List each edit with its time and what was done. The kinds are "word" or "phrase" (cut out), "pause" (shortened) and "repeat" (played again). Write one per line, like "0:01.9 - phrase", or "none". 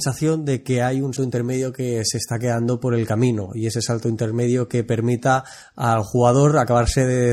0:01.2 - word